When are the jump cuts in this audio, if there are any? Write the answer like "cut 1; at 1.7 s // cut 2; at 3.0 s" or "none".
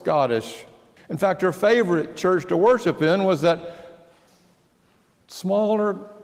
cut 1; at 1.0 s